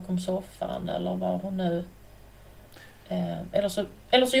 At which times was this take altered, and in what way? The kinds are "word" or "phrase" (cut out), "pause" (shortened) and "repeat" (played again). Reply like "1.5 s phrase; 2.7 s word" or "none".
none